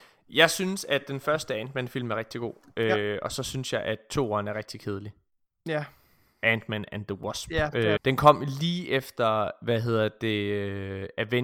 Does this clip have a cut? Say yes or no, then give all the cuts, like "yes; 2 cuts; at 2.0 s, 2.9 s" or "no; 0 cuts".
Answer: yes; 1 cut; at 8.0 s